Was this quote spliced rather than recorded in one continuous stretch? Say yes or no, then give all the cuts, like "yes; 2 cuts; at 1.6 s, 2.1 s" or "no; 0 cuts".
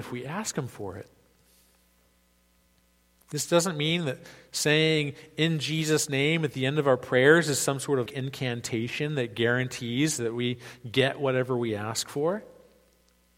yes; 1 cut; at 8.1 s